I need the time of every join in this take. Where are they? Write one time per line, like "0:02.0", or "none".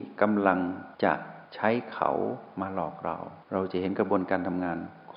0:00.9
0:01.4
0:03.4